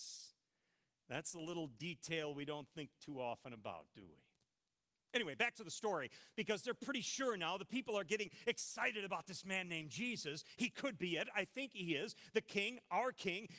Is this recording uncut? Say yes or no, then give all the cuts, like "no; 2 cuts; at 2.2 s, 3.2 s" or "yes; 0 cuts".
yes; 0 cuts